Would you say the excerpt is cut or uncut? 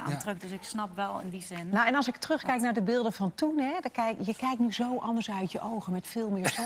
uncut